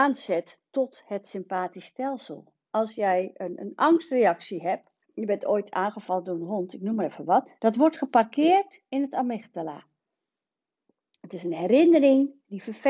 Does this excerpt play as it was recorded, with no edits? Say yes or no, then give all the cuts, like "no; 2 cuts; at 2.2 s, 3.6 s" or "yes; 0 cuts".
no; 2 cuts; at 5.0 s, 7.6 s